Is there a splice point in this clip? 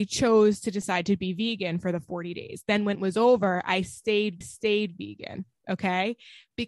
yes; 2 cuts; at 2.9 s, 4.4 s

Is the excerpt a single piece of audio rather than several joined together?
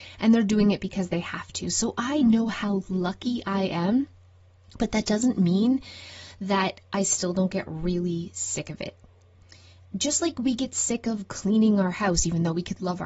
yes; 0 cuts

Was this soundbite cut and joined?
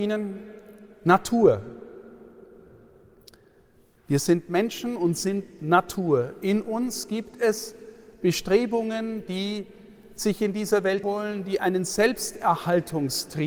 yes; 1 cut; at 11.0 s

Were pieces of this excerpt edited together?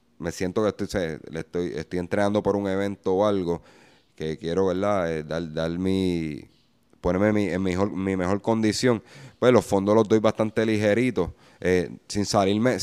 no; 0 cuts

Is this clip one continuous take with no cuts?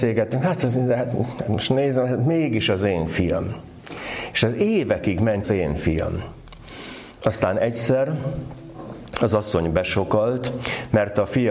no; 1 cut; at 5.4 s

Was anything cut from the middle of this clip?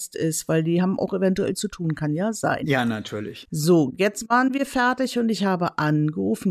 no; 0 cuts

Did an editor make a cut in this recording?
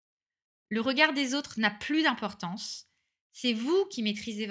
no; 0 cuts

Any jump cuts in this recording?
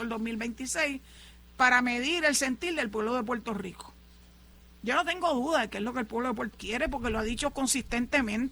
yes; 1 cut; at 6.5 s

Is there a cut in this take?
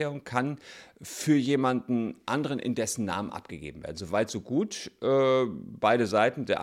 no; 0 cuts

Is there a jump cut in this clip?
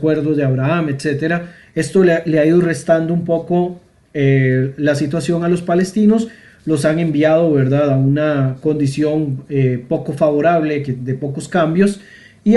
no; 0 cuts

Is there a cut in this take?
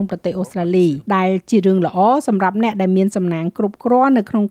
yes; 1 cut; at 1.1 s

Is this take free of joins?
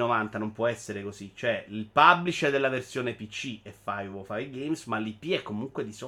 yes; 0 cuts

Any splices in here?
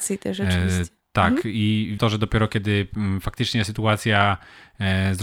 yes; 1 cut; at 2.0 s

